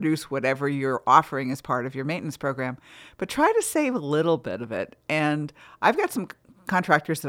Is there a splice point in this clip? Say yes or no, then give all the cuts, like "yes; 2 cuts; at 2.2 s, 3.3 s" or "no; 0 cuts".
no; 0 cuts